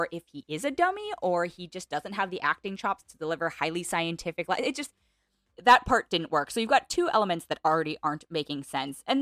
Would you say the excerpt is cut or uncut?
uncut